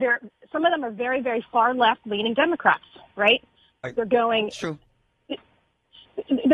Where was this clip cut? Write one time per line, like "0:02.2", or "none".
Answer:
0:02.0